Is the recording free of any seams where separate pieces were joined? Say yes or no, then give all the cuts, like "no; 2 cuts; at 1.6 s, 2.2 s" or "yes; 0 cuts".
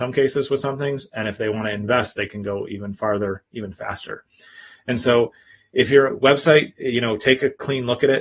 yes; 0 cuts